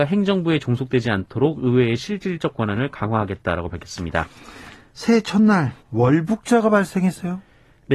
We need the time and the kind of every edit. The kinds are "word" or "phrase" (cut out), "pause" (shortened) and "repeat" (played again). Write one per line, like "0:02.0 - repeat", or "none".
0:05.8 - pause